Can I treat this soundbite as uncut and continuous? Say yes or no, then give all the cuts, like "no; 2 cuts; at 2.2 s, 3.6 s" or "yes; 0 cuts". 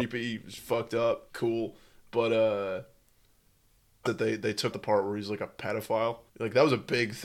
no; 4 cuts; at 1.3 s, 4.1 s, 4.7 s, 6.3 s